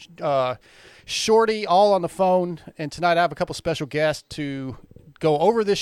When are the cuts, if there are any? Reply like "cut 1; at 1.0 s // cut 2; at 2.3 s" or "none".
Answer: none